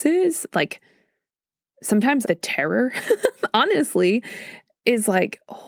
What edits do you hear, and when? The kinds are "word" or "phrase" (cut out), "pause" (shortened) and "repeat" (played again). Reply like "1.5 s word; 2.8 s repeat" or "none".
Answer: 2.2 s word